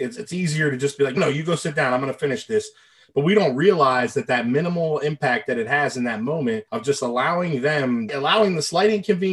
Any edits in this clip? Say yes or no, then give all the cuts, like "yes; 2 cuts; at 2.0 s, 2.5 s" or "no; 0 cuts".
yes; 3 cuts; at 1.2 s, 6.7 s, 8.1 s